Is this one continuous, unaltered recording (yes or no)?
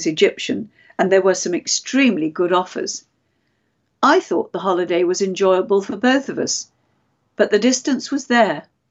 yes